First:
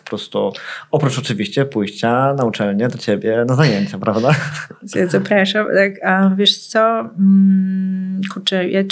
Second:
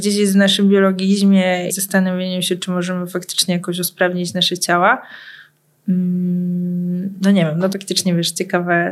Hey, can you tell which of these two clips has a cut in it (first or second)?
second